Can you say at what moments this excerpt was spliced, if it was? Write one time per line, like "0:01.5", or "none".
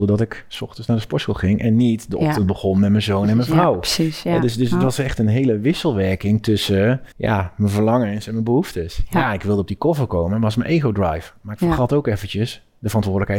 0:07.1